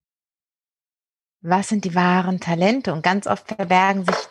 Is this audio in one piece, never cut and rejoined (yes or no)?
yes